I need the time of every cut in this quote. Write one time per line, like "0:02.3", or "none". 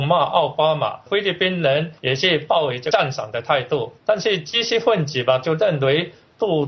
0:02.0
0:04.0